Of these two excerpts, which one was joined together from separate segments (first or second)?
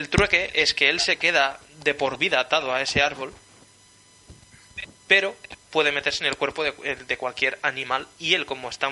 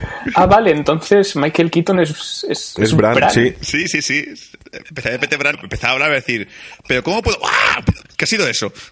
second